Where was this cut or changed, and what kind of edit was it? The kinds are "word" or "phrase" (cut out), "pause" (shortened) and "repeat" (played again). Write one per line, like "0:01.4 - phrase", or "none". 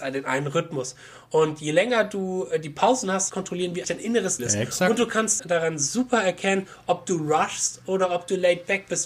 0:03.3 - phrase
0:03.8 - word
0:04.4 - word
0:05.4 - word

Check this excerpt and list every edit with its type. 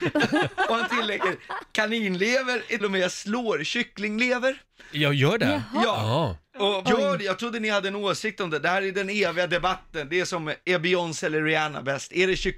0:02.8 - word
0:06.9 - word

